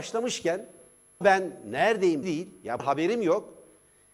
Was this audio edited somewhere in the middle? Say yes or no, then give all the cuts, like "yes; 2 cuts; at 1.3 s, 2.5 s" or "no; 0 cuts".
yes; 3 cuts; at 1.2 s, 2.2 s, 2.8 s